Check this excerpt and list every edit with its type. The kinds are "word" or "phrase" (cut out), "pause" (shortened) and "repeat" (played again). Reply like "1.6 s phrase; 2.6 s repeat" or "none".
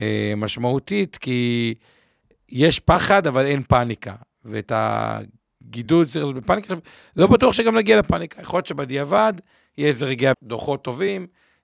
10.3 s word